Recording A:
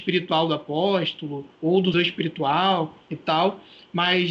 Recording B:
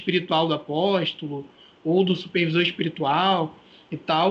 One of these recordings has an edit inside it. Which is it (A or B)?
A